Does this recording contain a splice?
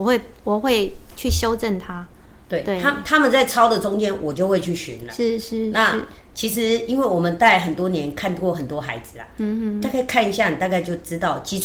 no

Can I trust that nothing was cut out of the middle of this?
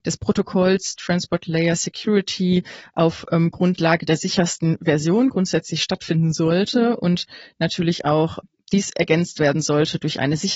yes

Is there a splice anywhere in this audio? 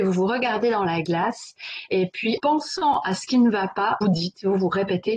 yes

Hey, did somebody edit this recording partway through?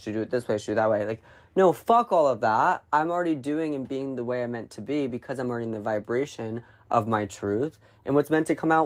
no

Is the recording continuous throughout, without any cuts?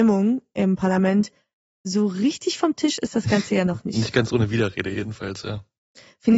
yes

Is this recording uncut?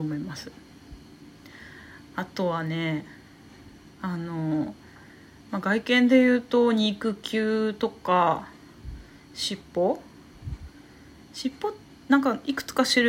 yes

